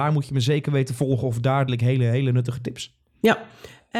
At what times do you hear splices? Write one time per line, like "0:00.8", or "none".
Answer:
0:01.7